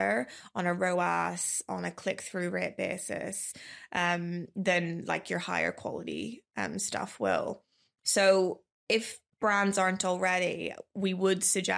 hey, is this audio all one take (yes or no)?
yes